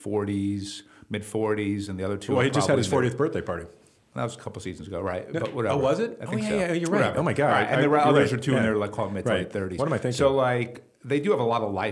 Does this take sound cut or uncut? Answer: uncut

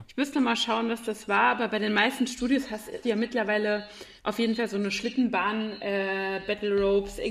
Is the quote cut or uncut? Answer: cut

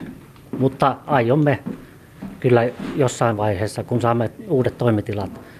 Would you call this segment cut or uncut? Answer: uncut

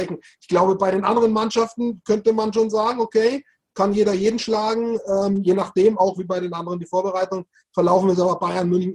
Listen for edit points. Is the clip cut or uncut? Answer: uncut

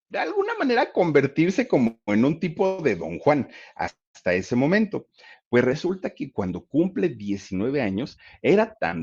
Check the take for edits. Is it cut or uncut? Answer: uncut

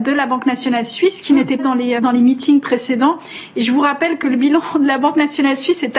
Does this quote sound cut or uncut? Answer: cut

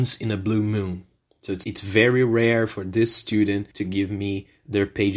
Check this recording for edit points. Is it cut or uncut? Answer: cut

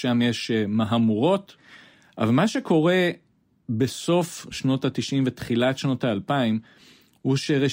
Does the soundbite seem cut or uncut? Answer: uncut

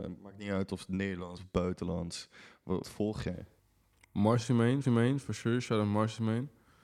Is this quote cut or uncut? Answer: cut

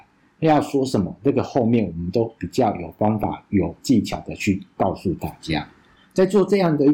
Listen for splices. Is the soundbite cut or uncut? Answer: uncut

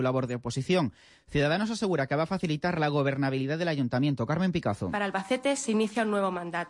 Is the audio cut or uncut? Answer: uncut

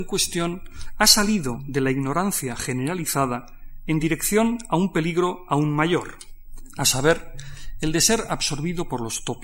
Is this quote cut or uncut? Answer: uncut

